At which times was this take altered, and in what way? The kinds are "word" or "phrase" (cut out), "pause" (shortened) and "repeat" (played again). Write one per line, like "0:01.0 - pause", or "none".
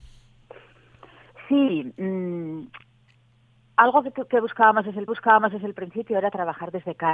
0:05.1 - repeat